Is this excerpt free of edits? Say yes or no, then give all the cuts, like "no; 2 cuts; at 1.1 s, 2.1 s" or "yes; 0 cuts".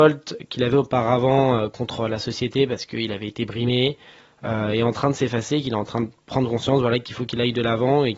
yes; 0 cuts